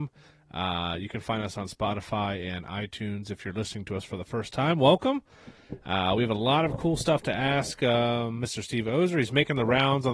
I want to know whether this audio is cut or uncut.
uncut